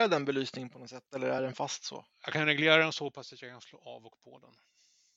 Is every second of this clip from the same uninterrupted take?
yes; 0 cuts

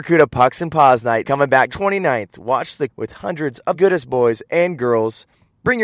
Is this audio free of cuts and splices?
no; 4 cuts; at 1.2 s, 1.7 s, 2.9 s, 3.7 s

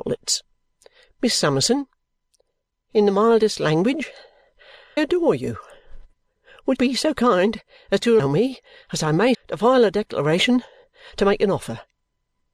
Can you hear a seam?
yes; 4 cuts; at 5.0 s, 6.8 s, 8.2 s, 9.3 s

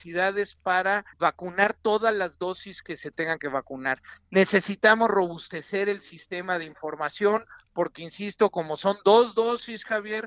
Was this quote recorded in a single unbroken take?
no; 1 cut; at 1.1 s

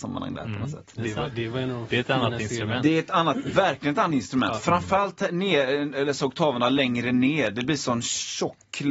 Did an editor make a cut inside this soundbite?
no; 0 cuts

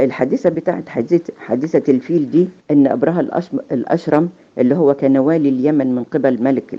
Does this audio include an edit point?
yes; 1 cut; at 2.6 s

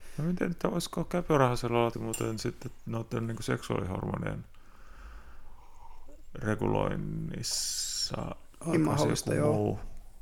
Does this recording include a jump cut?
yes; 2 cuts; at 1.9 s, 8.7 s

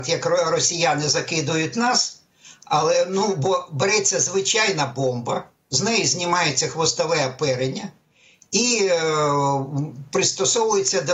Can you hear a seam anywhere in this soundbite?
no; 0 cuts

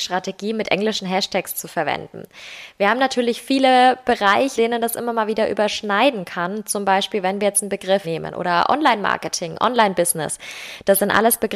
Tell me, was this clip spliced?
yes; 2 cuts; at 4.6 s, 8.0 s

